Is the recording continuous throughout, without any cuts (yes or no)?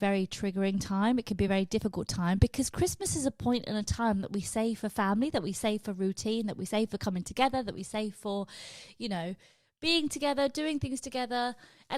yes